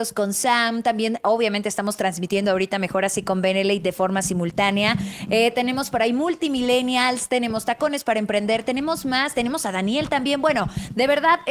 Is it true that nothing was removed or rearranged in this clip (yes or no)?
yes